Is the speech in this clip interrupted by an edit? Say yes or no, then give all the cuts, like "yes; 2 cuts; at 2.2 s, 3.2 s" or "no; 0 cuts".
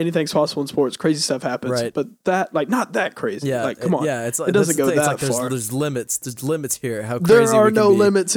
no; 0 cuts